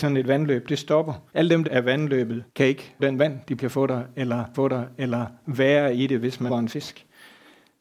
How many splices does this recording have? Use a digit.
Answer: 7